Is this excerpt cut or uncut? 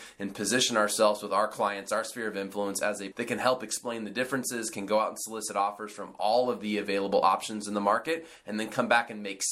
cut